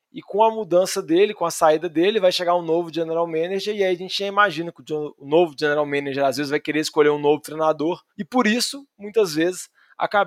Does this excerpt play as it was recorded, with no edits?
no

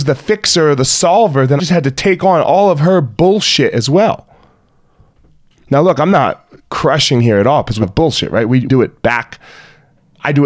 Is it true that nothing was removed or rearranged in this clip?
no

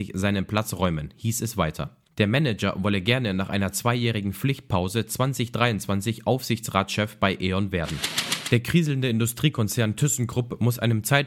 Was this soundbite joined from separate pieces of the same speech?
yes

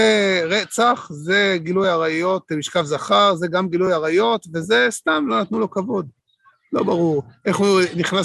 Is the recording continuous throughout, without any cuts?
yes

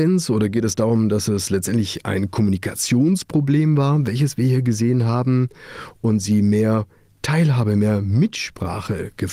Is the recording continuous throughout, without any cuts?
yes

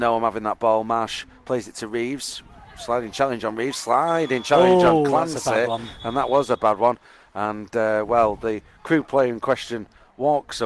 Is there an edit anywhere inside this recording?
no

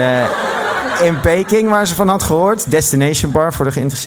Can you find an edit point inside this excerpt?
no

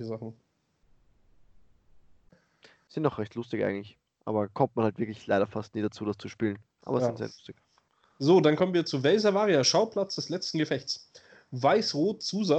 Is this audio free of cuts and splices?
yes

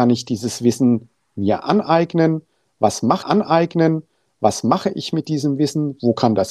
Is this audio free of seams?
no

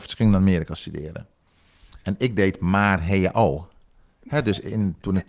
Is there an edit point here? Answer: no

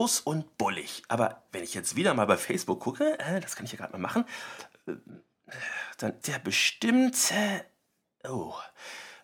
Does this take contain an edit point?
yes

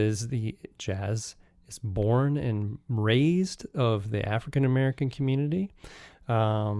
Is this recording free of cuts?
yes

